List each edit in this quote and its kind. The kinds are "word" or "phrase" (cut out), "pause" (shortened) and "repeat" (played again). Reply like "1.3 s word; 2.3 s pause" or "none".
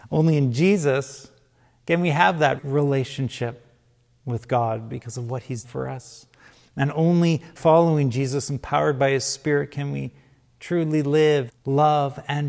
2.6 s word; 5.6 s word; 7.6 s word; 11.5 s word